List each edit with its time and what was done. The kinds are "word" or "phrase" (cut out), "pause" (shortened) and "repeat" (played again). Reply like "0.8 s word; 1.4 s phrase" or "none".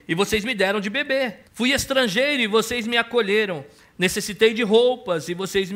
1.5 s pause